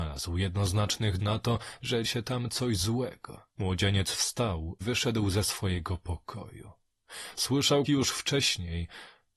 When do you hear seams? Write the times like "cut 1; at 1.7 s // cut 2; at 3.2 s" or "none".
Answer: cut 1; at 1.2 s // cut 2; at 2.0 s // cut 3; at 3.5 s // cut 4; at 4.8 s // cut 5; at 7.9 s

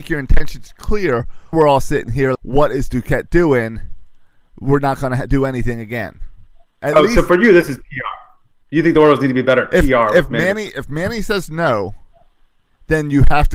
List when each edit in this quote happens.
cut 1; at 1.5 s // cut 2; at 2.3 s

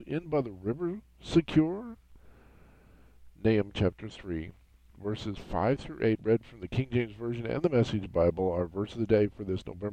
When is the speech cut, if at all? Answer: none

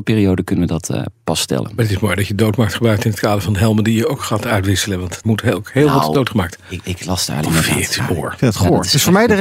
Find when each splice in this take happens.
cut 1; at 5.2 s // cut 2; at 7.4 s // cut 3; at 8.0 s

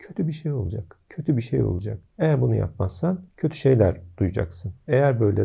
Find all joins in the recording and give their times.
cut 1; at 1.0 s // cut 2; at 2.1 s // cut 3; at 3.3 s

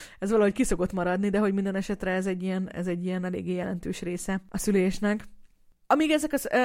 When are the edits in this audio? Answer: none

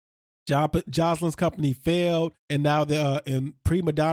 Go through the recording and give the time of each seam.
cut 1; at 2.4 s

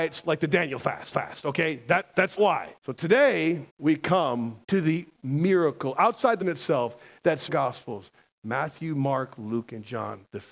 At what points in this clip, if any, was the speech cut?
cut 1; at 1.1 s // cut 2; at 2.4 s // cut 3; at 2.8 s // cut 4; at 3.7 s // cut 5; at 4.6 s // cut 6; at 5.1 s // cut 7; at 6.4 s // cut 8; at 7.5 s

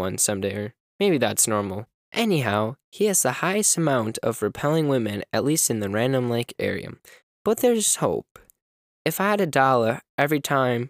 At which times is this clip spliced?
none

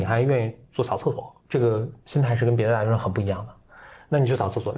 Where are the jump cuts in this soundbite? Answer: cut 1; at 1.4 s

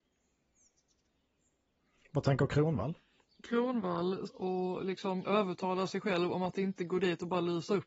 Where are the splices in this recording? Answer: cut 1; at 4.3 s // cut 2; at 5.2 s

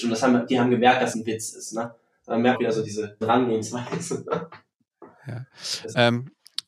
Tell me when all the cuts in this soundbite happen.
cut 1; at 1.1 s // cut 2; at 2.5 s // cut 3; at 3.2 s

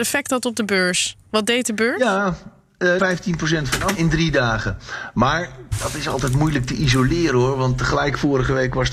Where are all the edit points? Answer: cut 1; at 3.0 s // cut 2; at 3.9 s

